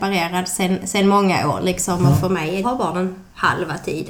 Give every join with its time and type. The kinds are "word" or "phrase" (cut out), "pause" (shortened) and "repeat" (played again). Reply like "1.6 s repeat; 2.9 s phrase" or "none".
2.6 s phrase

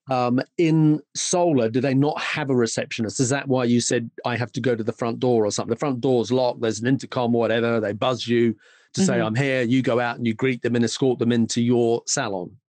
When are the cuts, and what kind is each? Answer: 5.7 s word

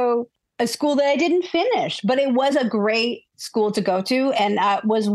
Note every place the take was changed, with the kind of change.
none

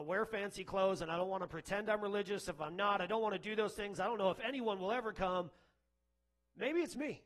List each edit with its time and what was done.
none

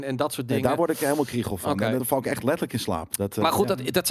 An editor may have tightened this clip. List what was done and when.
2.0 s word

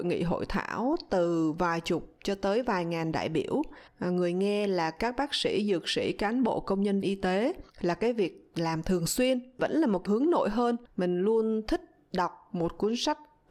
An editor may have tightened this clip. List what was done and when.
3.9 s pause; 7.0 s word; 7.7 s pause; 9.6 s phrase; 10.1 s word; 10.9 s pause

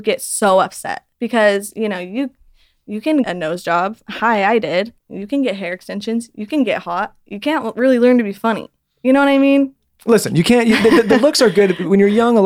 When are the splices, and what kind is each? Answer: 1.1 s pause; 3.2 s word; 5.0 s pause

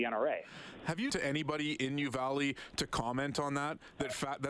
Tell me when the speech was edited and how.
1.1 s word

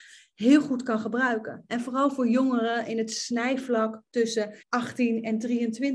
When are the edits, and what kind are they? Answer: 4.6 s pause

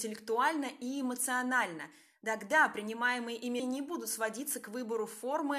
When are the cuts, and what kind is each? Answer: 3.6 s word

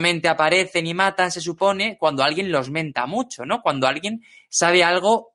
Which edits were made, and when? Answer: none

